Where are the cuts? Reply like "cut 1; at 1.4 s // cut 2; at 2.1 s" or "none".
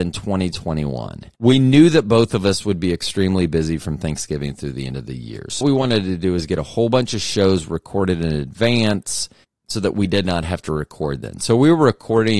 cut 1; at 1.3 s // cut 2; at 5.6 s // cut 3; at 9.4 s